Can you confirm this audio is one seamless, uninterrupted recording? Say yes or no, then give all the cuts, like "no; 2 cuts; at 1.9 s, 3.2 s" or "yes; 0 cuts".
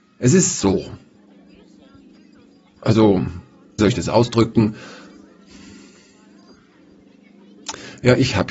no; 1 cut; at 3.8 s